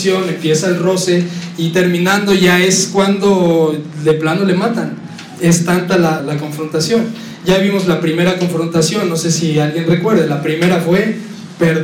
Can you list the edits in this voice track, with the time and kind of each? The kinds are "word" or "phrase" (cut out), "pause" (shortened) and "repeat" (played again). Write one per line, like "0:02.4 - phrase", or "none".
0:06.2 - word